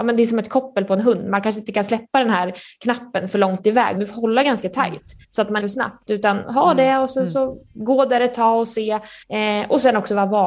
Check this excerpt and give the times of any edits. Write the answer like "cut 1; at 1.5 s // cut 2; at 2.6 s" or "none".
cut 1; at 4.0 s // cut 2; at 5.2 s // cut 3; at 5.6 s // cut 4; at 9.2 s